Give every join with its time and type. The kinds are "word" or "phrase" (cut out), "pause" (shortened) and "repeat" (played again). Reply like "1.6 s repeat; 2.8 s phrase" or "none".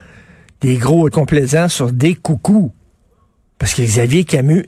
1.1 s word